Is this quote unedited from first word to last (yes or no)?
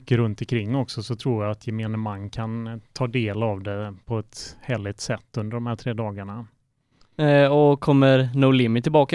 yes